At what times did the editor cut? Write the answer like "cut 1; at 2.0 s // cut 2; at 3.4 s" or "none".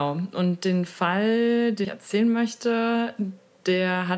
cut 1; at 1.8 s